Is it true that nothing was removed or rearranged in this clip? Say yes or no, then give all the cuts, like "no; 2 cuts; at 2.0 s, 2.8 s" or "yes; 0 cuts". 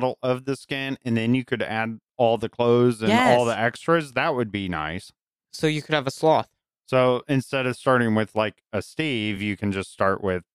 yes; 0 cuts